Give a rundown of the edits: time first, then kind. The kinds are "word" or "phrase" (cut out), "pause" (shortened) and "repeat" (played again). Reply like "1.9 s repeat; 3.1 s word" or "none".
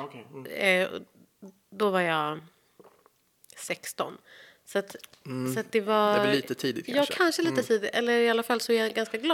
none